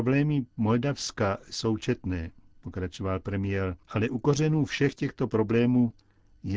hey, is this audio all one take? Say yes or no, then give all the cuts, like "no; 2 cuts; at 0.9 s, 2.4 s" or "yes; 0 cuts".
no; 1 cut; at 3.8 s